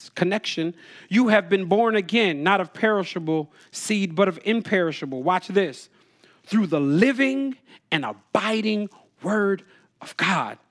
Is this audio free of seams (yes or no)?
yes